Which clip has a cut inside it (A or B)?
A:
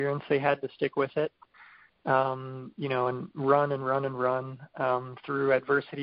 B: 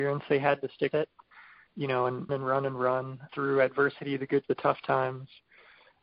B